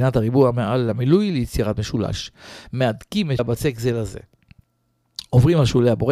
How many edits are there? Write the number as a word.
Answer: one